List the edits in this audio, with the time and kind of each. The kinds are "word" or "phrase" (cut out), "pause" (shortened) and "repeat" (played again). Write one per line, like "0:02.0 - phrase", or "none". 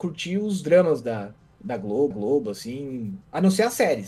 0:02.1 - repeat